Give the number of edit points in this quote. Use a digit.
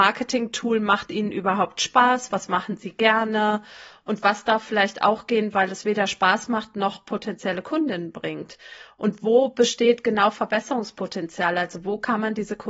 0